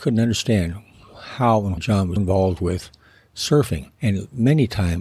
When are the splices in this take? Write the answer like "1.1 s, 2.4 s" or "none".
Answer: 1.8 s, 2.2 s, 3.9 s